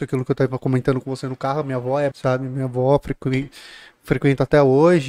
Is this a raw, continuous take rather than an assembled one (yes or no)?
no